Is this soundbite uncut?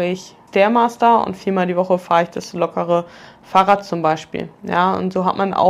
yes; 0 cuts

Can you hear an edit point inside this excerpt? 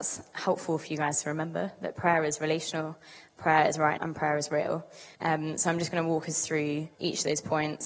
yes; 3 cuts; at 4.0 s, 5.2 s, 6.9 s

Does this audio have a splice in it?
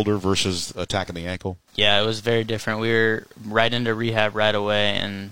no; 0 cuts

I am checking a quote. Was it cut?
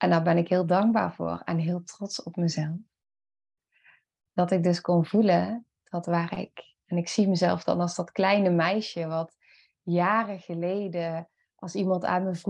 no; 0 cuts

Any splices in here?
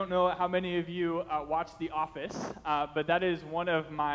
no; 0 cuts

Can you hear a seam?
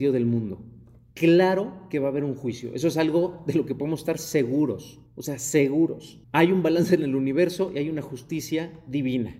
yes; 2 cuts; at 5.1 s, 6.2 s

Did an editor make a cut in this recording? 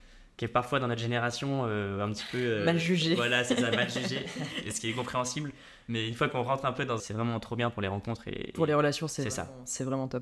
yes; 1 cut; at 7.0 s

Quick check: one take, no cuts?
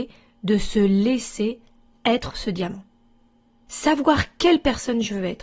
yes; 0 cuts

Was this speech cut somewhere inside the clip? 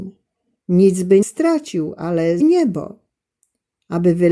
yes; 2 cuts; at 1.2 s, 2.4 s

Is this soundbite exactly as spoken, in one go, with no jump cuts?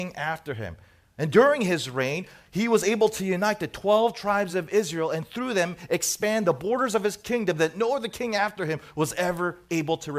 yes; 0 cuts

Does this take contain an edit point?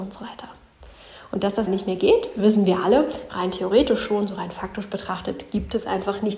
yes; 1 cut; at 1.7 s

